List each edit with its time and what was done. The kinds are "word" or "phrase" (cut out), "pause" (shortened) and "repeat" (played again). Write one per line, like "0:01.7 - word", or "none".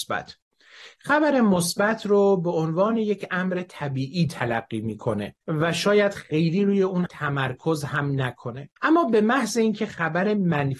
0:05.4 - pause
0:07.1 - word
0:08.8 - pause